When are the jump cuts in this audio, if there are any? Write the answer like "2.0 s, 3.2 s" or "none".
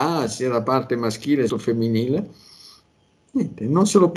1.5 s